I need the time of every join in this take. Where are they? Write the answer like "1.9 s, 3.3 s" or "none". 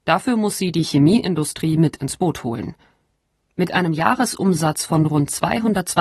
none